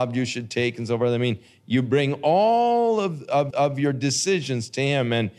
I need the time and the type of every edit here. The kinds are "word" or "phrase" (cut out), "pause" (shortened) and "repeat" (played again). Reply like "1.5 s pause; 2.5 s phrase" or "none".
3.5 s repeat